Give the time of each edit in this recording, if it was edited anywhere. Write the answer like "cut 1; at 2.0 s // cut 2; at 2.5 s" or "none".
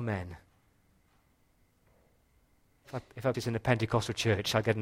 cut 1; at 3.3 s